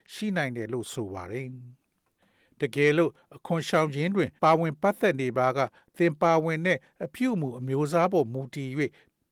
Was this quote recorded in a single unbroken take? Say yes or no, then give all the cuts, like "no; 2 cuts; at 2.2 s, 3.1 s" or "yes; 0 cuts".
no; 1 cut; at 4.4 s